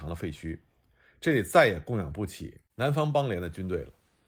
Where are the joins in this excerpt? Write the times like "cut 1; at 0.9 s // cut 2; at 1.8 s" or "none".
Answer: cut 1; at 2.7 s